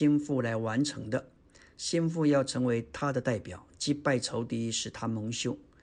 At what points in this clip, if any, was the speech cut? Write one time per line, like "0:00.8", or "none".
none